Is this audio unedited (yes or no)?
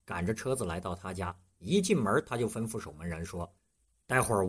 no